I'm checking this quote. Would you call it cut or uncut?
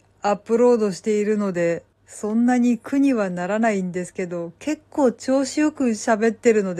cut